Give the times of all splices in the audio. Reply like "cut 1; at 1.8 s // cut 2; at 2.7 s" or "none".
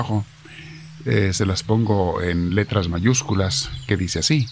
none